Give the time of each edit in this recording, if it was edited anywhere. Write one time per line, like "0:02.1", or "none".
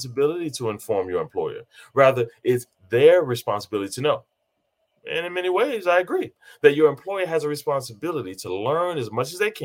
none